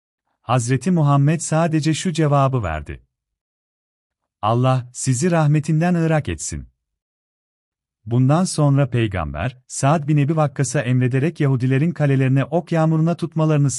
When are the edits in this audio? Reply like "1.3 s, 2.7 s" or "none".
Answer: none

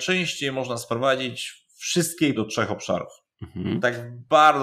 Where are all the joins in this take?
2.3 s, 3.3 s

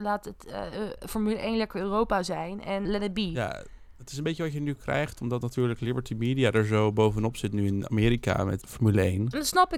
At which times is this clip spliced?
2.8 s, 8.6 s

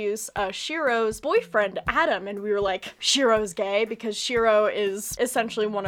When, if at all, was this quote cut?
none

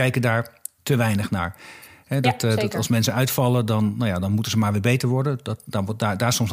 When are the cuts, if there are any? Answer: none

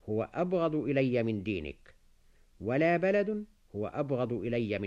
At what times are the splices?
none

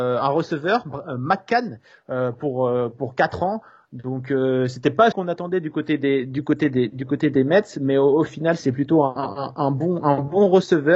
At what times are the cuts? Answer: 5.1 s

